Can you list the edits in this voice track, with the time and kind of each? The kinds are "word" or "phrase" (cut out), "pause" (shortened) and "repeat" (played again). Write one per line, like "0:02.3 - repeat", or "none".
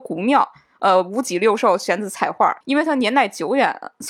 0:02.6 - pause